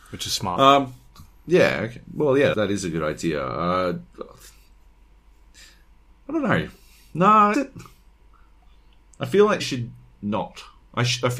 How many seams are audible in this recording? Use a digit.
3